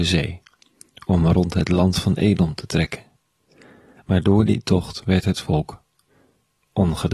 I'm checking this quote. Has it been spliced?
no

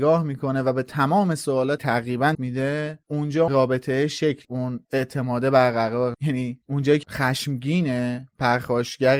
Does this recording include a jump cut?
yes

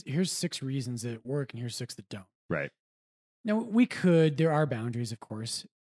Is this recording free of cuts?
yes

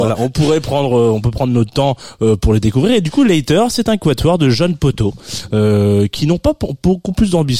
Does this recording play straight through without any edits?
yes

